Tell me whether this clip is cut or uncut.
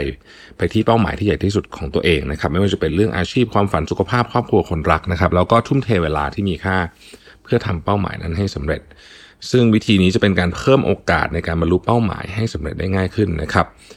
uncut